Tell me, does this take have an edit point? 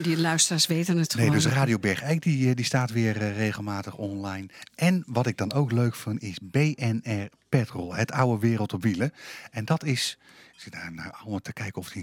no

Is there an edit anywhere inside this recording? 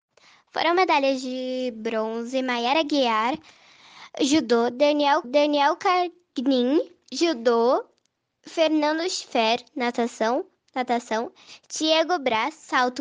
yes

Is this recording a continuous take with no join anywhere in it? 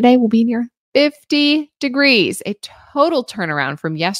yes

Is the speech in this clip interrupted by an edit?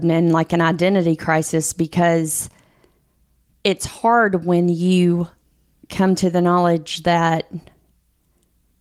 no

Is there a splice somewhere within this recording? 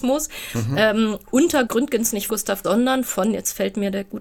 yes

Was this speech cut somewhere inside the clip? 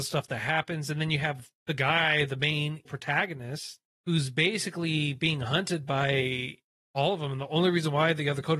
yes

